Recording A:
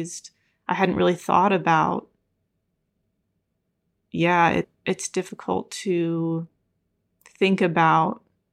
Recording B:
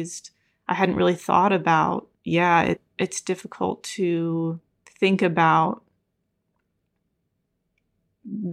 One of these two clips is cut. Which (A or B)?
B